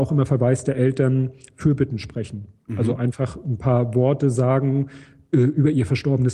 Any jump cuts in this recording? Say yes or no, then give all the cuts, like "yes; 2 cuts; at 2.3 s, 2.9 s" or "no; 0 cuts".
no; 0 cuts